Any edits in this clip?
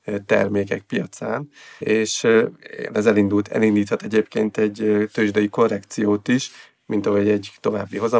yes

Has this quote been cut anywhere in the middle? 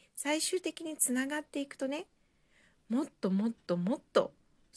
no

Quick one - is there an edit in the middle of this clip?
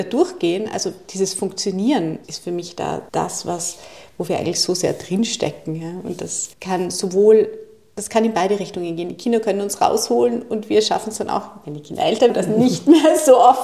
yes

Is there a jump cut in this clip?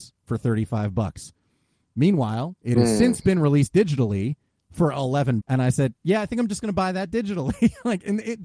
yes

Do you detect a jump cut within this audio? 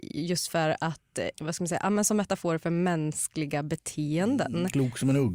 yes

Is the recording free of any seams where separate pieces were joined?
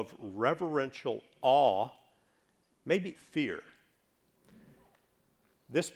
no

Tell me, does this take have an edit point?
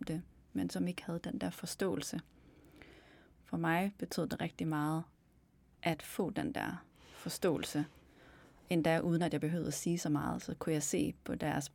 no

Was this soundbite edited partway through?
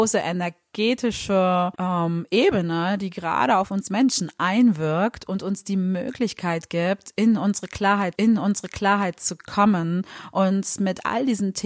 yes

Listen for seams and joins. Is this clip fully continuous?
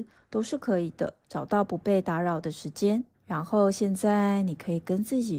no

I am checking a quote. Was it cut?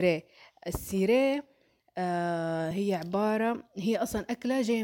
no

